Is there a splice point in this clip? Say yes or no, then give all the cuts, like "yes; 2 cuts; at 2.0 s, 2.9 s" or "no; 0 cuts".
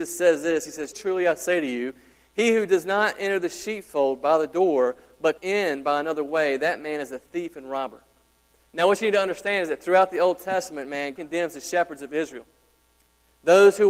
yes; 3 cuts; at 0.9 s, 5.4 s, 11.2 s